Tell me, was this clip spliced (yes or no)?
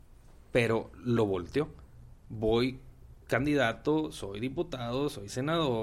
yes